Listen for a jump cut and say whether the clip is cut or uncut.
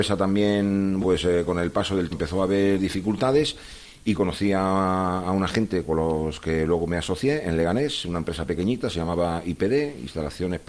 cut